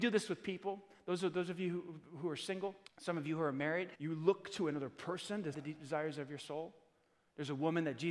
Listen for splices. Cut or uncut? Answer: cut